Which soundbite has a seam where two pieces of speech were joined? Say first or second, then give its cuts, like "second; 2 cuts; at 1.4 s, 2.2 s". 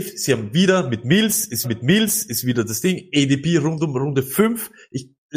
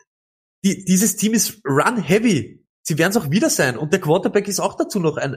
first; 1 cut; at 1.6 s